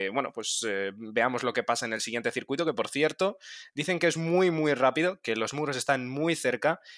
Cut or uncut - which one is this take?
uncut